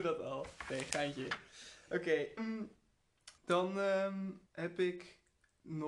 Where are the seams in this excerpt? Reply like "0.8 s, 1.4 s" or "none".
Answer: 2.4 s, 3.4 s, 4.5 s